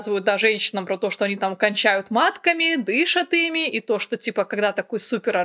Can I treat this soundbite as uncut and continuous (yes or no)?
yes